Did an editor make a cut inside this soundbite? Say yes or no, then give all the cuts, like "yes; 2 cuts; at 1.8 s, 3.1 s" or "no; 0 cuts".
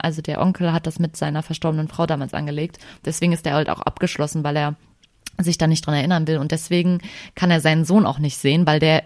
no; 0 cuts